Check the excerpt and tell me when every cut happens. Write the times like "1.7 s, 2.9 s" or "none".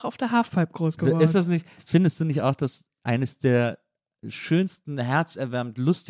none